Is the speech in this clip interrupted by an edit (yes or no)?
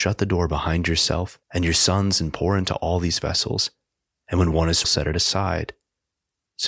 yes